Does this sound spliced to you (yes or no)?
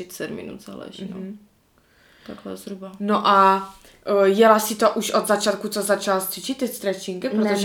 no